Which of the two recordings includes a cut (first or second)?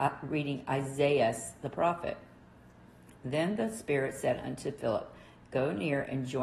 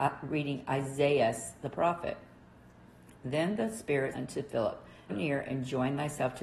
second